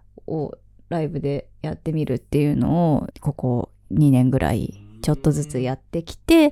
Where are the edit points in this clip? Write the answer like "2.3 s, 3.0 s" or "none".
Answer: 3.1 s